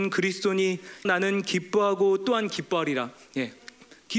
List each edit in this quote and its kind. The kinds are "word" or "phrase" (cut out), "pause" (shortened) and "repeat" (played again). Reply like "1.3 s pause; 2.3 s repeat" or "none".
1.0 s word